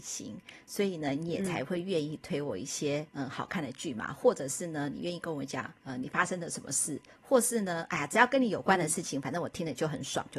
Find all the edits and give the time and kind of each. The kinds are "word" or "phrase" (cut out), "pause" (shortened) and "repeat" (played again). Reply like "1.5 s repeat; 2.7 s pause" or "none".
3.1 s pause; 5.8 s pause